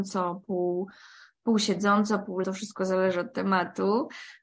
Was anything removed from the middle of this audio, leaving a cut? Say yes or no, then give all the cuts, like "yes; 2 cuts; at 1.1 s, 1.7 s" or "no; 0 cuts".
yes; 1 cut; at 2.4 s